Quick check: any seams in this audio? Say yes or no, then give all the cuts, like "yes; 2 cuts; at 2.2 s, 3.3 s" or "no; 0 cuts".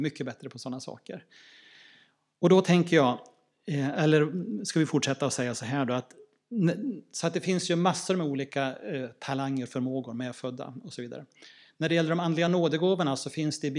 no; 0 cuts